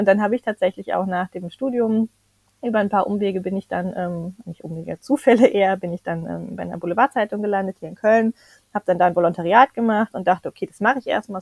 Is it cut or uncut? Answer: uncut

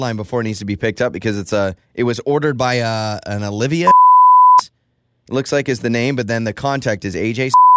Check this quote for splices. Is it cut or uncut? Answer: cut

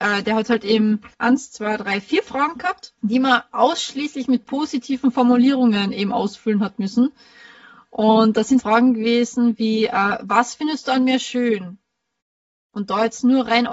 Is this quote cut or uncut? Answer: cut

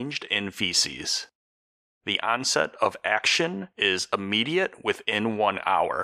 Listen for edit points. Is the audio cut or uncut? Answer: uncut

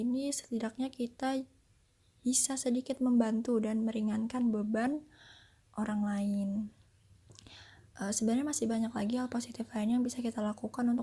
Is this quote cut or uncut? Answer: uncut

